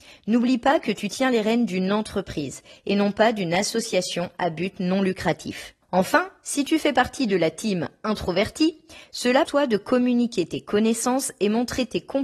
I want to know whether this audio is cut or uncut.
cut